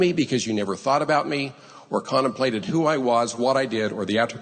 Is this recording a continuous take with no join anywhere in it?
yes; 0 cuts

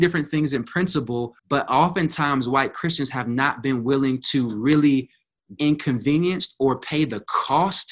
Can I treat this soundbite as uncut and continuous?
no; 2 cuts; at 1.4 s, 5.6 s

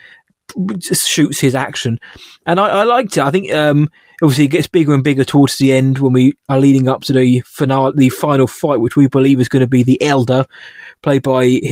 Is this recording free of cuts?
yes; 0 cuts

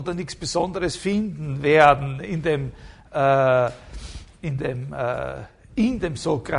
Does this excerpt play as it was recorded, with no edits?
yes; 0 cuts

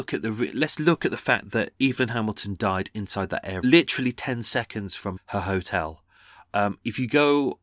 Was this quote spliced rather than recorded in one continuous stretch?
yes; 2 cuts; at 3.6 s, 5.2 s

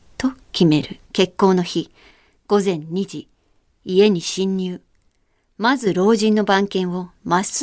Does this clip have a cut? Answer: yes; 1 cut; at 1.0 s

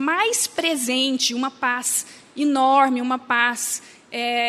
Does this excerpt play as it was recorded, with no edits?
yes; 0 cuts

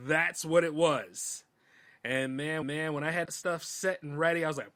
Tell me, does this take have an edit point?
yes; 2 cuts; at 2.6 s, 3.3 s

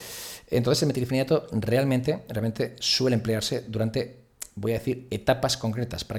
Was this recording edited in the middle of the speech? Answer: no; 0 cuts

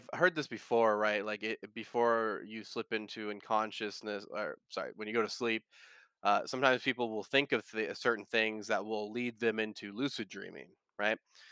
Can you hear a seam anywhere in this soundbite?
no; 0 cuts

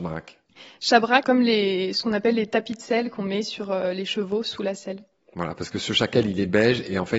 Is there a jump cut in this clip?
yes; 1 cut; at 1.2 s

